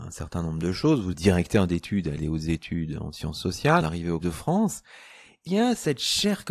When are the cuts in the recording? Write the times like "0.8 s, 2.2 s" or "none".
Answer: 1.1 s, 2.2 s, 3.8 s, 4.2 s, 5.5 s